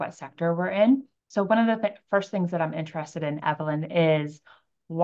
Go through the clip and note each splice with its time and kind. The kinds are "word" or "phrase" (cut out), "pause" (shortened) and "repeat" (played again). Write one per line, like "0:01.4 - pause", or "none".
0:01.2 - pause